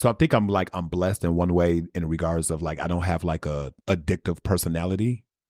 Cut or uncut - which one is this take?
cut